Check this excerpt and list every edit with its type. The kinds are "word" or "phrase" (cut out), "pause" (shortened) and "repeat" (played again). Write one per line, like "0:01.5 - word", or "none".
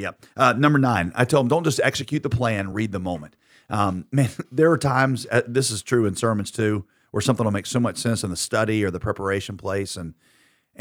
none

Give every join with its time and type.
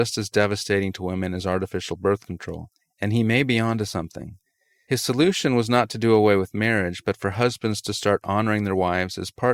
none

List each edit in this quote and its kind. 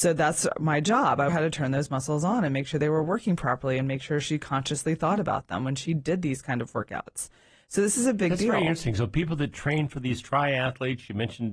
0:01.3 - phrase

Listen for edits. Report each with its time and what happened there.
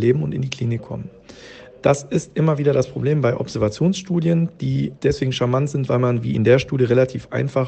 0:05.0 - word

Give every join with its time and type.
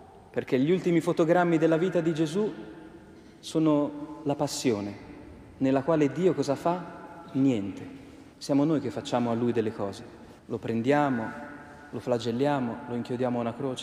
0:08.3 - pause
0:10.4 - pause

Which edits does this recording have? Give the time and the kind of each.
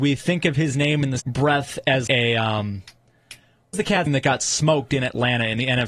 0:01.2 - word
0:02.1 - word
0:03.7 - word
0:04.1 - word

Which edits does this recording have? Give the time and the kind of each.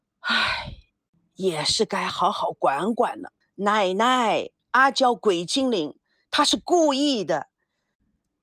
0:03.4 - pause
0:04.6 - pause

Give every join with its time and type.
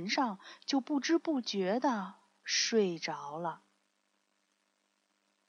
none

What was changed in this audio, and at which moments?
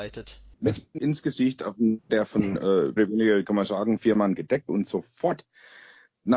0:01.0 - word
0:02.1 - word
0:03.0 - word
0:04.7 - word

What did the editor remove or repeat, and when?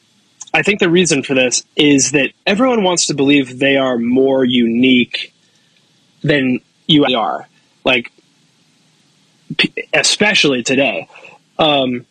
0:01.7 - pause
0:02.4 - word
0:07.1 - word

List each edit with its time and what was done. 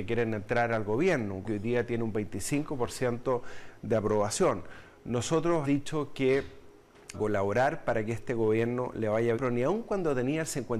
0:01.4 - word
0:05.6 - word
0:07.1 - word
0:09.3 - word

